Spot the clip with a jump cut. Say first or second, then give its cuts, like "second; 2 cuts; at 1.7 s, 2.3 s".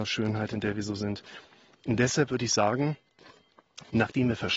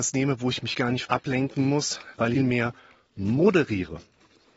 second; 2 cuts; at 1.1 s, 2.4 s